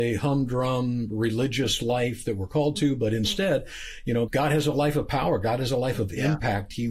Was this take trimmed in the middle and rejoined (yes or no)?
yes